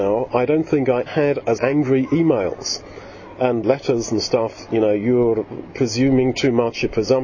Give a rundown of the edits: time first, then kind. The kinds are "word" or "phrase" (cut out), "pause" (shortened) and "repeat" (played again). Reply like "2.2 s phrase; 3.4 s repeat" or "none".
1.1 s word; 1.6 s word; 3.6 s word